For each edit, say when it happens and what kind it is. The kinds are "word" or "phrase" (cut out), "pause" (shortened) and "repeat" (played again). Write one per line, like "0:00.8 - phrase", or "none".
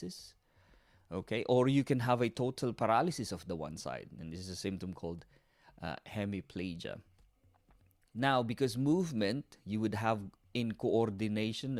none